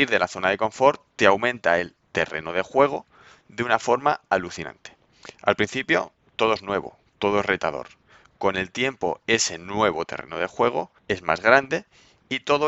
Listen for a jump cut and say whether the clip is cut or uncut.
uncut